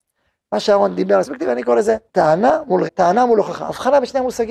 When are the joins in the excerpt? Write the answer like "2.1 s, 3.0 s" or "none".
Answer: 1.2 s, 2.1 s, 2.9 s